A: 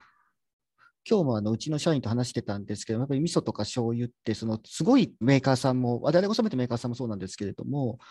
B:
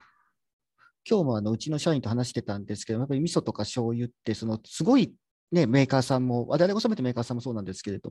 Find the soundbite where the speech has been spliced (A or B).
A